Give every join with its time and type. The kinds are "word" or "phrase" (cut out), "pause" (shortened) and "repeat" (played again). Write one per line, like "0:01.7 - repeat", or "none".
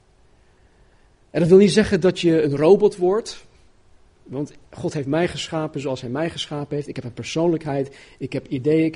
none